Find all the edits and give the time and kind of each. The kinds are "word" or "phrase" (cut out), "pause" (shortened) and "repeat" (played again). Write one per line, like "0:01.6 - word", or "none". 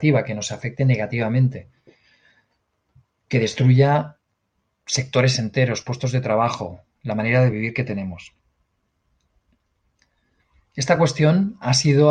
none